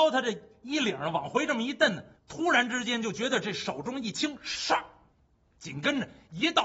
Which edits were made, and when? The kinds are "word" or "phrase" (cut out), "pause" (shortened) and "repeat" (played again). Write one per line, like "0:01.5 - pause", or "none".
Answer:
0:02.2 - pause
0:05.1 - pause